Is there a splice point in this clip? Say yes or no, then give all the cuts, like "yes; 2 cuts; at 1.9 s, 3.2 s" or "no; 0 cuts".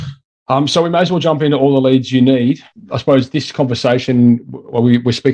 no; 0 cuts